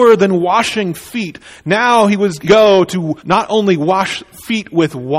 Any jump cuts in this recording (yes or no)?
yes